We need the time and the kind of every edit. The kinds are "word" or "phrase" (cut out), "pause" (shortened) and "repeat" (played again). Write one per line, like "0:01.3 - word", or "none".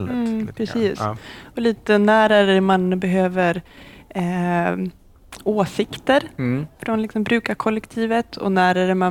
0:06.7 - pause